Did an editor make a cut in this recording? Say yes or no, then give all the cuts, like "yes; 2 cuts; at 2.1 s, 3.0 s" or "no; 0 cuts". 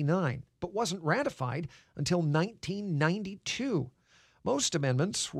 no; 0 cuts